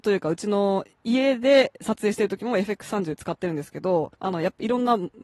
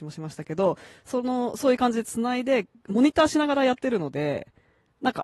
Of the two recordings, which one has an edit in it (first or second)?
first